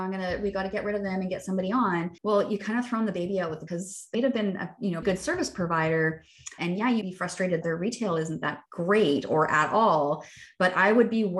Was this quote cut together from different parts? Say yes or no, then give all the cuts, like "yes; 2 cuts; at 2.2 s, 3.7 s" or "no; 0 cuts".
yes; 8 cuts; at 2.2 s, 3.7 s, 4.1 s, 5.0 s, 6.6 s, 7.0 s, 7.6 s, 8.6 s